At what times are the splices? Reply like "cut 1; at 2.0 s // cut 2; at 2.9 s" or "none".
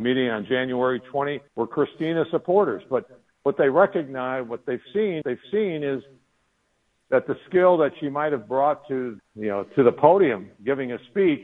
cut 1; at 1.5 s // cut 2; at 5.2 s // cut 3; at 9.2 s